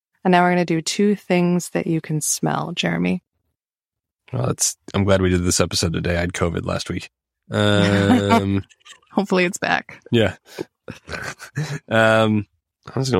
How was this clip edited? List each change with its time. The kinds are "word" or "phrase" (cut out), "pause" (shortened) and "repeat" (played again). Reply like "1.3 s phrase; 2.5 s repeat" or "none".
none